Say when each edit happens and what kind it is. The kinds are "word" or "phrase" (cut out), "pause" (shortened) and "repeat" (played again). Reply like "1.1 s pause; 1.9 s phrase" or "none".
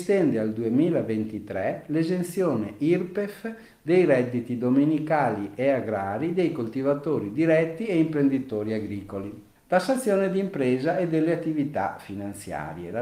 9.5 s pause

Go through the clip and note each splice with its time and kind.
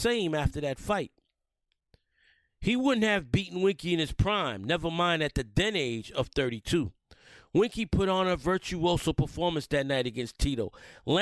none

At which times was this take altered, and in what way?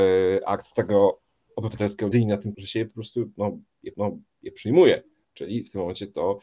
2.1 s phrase; 2.5 s word; 3.9 s repeat

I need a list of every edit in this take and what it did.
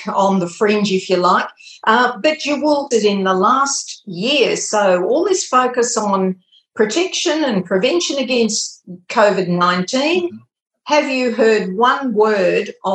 2.9 s word

